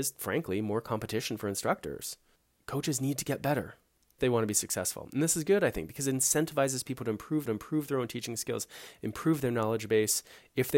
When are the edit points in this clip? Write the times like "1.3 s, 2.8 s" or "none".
4.2 s, 7.5 s